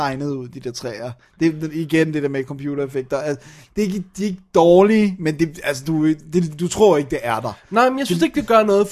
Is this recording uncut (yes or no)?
yes